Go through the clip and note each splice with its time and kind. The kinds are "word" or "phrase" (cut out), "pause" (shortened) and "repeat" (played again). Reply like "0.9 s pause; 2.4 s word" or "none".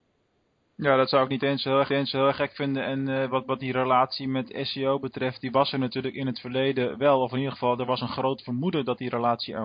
1.9 s repeat